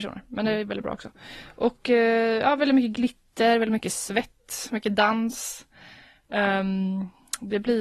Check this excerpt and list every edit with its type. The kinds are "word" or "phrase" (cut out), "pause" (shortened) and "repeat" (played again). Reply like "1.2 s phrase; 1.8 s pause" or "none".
none